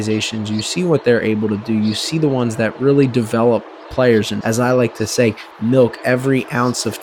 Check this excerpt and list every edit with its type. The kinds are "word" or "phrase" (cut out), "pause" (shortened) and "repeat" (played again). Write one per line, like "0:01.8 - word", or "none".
0:04.4 - word